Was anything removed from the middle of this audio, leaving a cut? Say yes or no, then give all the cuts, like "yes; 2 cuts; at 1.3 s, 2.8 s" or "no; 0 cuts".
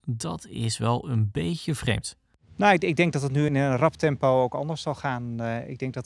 yes; 1 cut; at 3.5 s